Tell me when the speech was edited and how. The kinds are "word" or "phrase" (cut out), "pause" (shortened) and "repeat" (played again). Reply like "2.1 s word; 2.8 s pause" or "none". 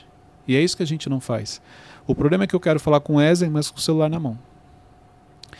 none